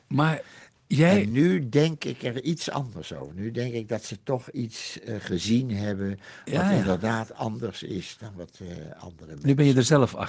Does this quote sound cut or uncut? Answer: uncut